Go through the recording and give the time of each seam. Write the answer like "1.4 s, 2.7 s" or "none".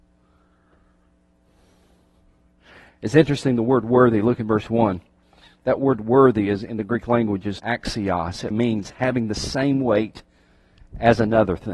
7.6 s, 8.5 s